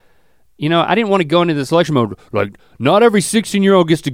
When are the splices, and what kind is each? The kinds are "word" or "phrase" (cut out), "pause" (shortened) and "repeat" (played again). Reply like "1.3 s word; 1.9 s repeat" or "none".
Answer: none

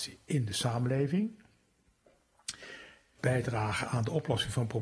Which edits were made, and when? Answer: 3.2 s word

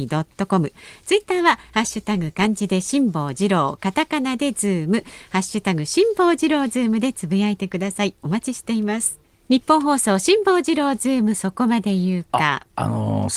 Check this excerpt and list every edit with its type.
9.2 s pause

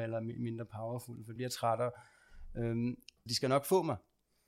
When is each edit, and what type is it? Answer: 1.4 s word; 3.3 s word

